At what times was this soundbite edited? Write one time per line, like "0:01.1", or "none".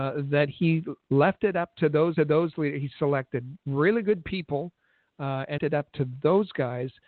0:01.1
0:02.2
0:05.6